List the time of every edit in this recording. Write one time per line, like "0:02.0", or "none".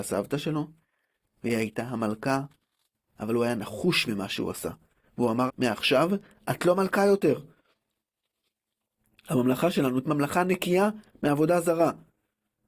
0:04.0
0:05.5
0:10.0